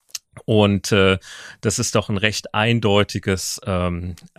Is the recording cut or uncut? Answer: uncut